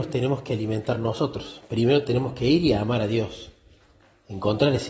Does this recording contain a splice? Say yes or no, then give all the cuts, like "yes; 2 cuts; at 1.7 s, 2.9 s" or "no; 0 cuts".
no; 0 cuts